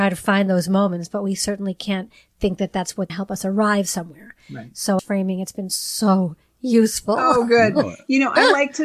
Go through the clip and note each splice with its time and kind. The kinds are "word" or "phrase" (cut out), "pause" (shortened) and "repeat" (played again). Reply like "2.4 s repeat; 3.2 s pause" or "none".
3.1 s phrase; 5.0 s phrase